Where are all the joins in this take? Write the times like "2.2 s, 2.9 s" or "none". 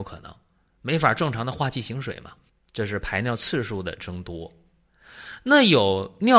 2.5 s